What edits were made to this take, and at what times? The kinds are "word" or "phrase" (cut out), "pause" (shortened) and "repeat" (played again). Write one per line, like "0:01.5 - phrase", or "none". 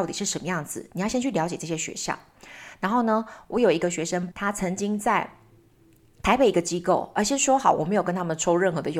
0:04.3 - word